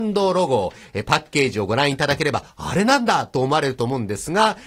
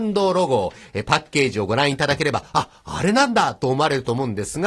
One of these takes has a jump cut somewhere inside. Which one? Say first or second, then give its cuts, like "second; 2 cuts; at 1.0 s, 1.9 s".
first; 1 cut; at 2.5 s